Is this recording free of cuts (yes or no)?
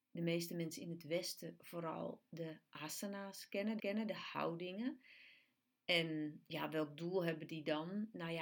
no